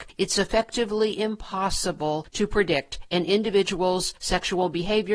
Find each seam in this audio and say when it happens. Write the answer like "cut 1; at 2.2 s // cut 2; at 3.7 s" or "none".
none